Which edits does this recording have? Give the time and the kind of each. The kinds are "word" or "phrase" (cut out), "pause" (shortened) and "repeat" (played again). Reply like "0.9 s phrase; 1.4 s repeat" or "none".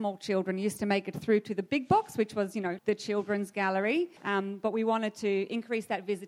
2.8 s word; 4.2 s pause